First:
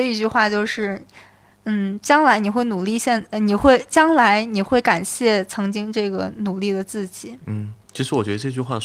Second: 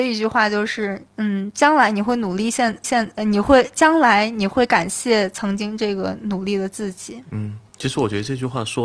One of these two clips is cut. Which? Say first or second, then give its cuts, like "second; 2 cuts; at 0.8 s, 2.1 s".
second; 2 cuts; at 1.1 s, 2.8 s